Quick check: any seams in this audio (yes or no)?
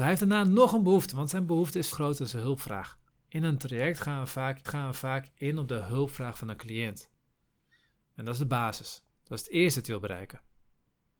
yes